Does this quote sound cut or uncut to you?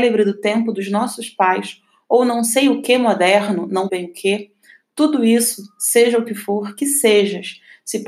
cut